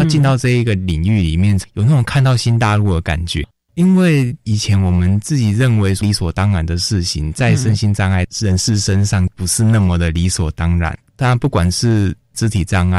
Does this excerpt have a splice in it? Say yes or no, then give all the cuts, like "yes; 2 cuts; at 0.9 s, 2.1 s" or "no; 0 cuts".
no; 0 cuts